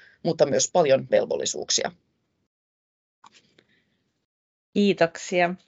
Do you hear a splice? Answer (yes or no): yes